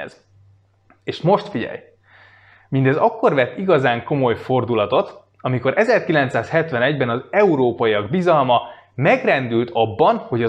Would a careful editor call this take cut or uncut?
uncut